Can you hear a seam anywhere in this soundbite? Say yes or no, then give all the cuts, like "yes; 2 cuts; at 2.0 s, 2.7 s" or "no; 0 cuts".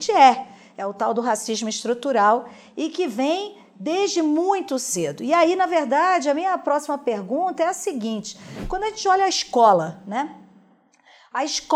no; 0 cuts